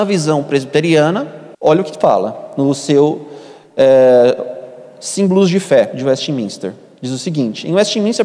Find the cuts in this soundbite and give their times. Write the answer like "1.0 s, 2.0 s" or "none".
1.5 s